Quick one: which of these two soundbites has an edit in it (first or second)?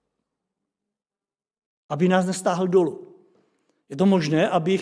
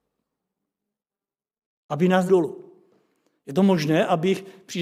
second